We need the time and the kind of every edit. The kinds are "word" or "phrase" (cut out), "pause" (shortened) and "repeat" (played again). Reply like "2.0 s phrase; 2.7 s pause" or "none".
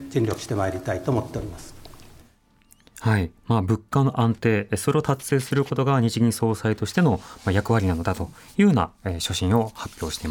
none